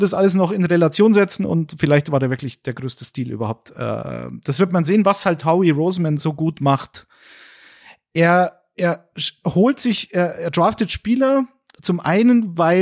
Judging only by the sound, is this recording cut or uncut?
uncut